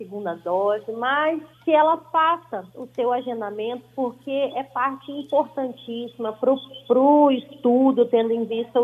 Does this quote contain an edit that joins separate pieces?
yes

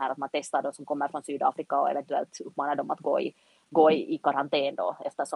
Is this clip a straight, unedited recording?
yes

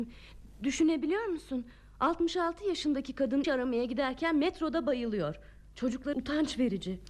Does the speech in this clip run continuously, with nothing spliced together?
no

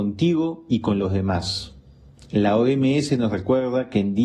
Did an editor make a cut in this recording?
no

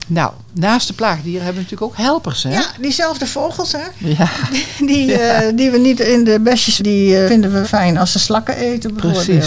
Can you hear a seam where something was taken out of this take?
yes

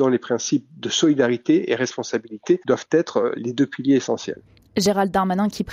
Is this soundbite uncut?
yes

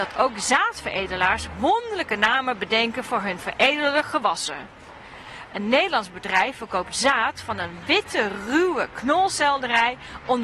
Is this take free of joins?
yes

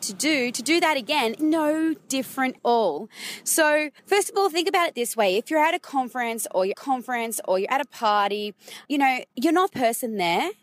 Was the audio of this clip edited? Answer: yes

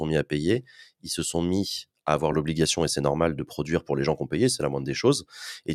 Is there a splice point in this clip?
no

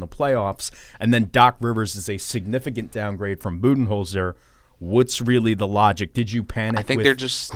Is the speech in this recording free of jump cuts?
yes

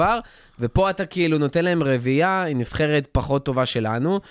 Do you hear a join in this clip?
no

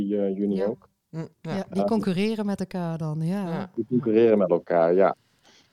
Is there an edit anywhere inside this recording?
yes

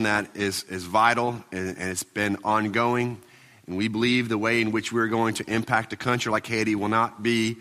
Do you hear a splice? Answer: no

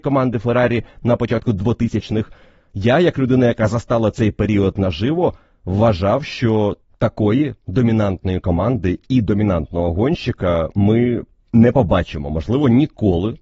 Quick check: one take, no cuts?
yes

